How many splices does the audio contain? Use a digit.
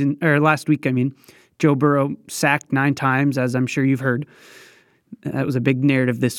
0